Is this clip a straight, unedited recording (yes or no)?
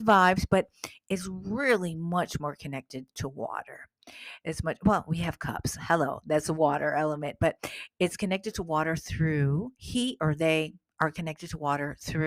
yes